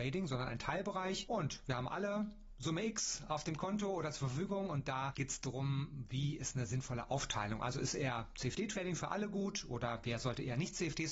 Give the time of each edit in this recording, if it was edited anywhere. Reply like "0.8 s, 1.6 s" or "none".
none